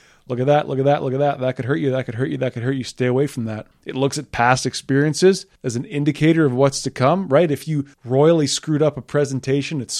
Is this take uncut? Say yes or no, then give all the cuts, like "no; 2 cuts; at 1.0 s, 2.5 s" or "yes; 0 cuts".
no; 2 cuts; at 5.6 s, 7.9 s